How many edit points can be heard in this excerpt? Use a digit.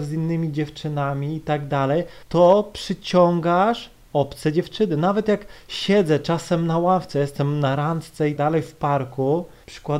2